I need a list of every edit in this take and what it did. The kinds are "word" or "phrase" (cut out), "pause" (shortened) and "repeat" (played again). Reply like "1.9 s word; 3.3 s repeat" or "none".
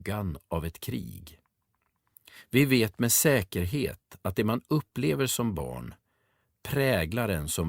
none

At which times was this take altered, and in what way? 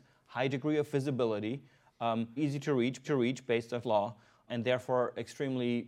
2.4 s word; 3.0 s repeat; 3.8 s word; 4.5 s word

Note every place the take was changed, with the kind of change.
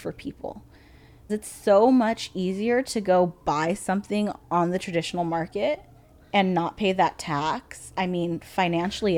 1.3 s word; 4.4 s pause; 6.0 s pause

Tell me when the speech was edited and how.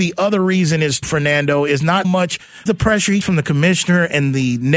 1.0 s word; 2.0 s word; 2.7 s word; 3.2 s word

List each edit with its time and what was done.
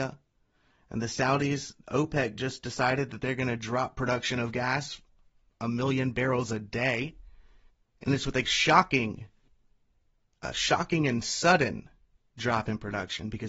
8.4 s phrase

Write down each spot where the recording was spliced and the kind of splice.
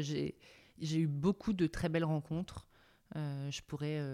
none

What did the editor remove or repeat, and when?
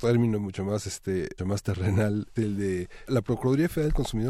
1.4 s word; 2.4 s word; 3.1 s word

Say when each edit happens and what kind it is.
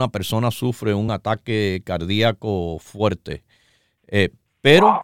none

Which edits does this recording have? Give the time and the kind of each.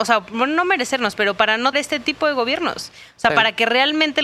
1.7 s word

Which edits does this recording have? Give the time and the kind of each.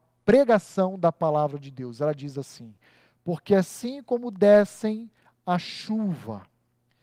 none

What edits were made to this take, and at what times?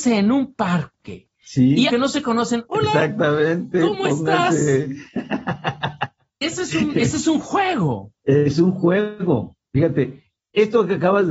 1.3 s pause; 1.9 s phrase; 6.4 s word

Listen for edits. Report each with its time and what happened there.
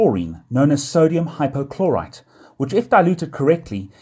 none

